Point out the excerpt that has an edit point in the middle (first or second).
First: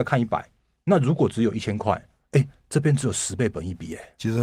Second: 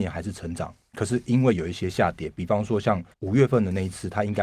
second